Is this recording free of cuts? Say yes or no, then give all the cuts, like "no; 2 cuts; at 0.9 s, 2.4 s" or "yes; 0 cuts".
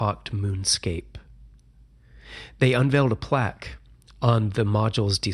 yes; 0 cuts